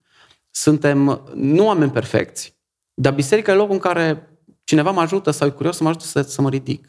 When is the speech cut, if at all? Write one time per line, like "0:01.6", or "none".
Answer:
none